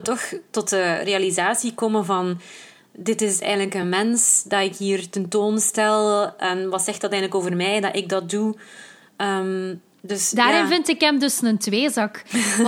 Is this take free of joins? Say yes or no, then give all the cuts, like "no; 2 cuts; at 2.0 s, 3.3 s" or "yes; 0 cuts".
yes; 0 cuts